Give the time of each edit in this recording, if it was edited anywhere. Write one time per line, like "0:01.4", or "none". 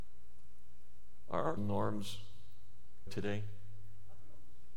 0:01.6
0:03.1